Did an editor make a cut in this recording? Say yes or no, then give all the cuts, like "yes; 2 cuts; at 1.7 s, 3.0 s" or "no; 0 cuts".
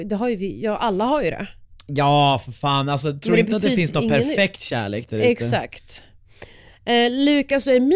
no; 0 cuts